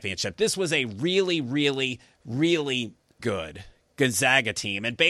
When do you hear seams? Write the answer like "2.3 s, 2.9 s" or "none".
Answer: 3.2 s